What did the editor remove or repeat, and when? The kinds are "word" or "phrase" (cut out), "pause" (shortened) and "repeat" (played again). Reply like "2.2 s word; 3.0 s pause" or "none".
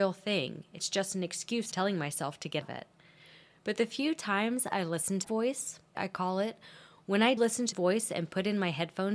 1.7 s word; 2.6 s word; 5.2 s word; 5.9 s word; 7.4 s word; 7.7 s word